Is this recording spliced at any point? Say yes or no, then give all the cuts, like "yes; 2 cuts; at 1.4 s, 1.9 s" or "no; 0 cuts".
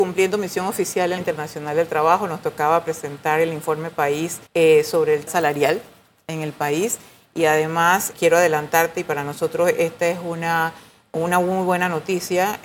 yes; 4 cuts; at 1.2 s, 4.5 s, 5.3 s, 8.1 s